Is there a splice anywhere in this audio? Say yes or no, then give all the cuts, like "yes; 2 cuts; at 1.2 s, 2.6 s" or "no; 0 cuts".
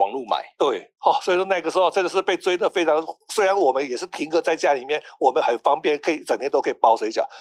yes; 1 cut; at 1.0 s